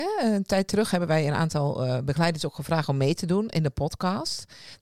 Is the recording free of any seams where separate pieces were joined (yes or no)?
yes